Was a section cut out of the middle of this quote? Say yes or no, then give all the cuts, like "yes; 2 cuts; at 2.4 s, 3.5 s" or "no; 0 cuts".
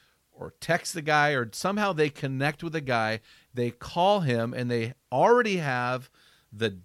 no; 0 cuts